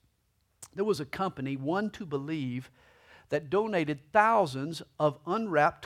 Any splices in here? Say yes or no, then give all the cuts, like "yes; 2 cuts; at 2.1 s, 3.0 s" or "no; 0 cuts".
no; 0 cuts